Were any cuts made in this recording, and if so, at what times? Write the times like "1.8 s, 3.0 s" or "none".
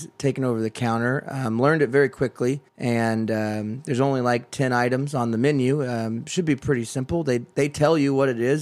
2.7 s